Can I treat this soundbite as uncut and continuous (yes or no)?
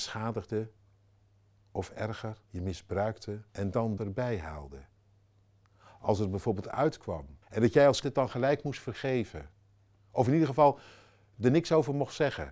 no